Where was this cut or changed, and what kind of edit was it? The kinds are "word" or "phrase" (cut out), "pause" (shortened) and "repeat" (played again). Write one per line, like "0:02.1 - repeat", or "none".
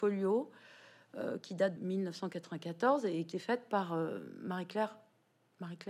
0:01.8 - word
0:03.3 - phrase